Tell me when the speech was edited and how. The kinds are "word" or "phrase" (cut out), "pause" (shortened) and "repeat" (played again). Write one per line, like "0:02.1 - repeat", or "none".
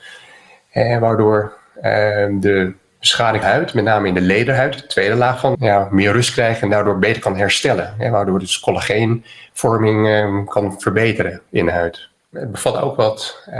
0:03.4 - phrase
0:05.5 - phrase